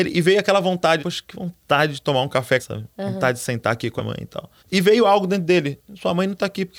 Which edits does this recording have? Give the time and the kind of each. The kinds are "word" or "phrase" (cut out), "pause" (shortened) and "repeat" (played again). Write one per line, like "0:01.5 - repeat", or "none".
0:01.0 - word
0:02.6 - phrase
0:04.0 - word
0:04.6 - pause